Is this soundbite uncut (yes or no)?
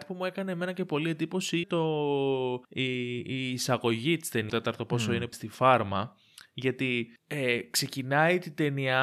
no